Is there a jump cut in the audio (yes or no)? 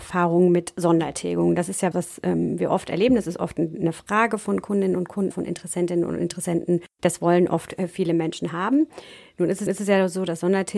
yes